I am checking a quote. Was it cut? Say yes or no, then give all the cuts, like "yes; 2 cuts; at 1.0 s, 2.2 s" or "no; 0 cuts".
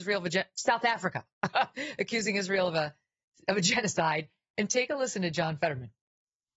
no; 0 cuts